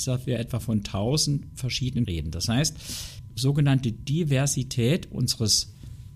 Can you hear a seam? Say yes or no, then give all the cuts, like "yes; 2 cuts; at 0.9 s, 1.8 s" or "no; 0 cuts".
yes; 2 cuts; at 2.0 s, 3.3 s